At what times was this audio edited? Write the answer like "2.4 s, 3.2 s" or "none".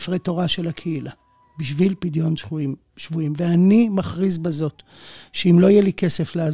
none